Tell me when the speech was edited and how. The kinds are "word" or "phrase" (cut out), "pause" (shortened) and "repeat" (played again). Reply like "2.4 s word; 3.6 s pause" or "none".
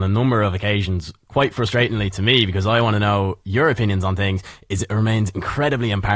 none